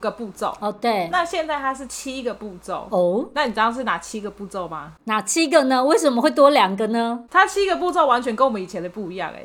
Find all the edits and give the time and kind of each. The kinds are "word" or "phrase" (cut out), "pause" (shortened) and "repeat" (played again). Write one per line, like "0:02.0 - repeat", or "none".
none